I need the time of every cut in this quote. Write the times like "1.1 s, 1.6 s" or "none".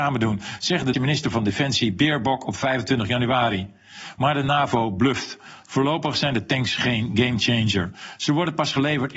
0.9 s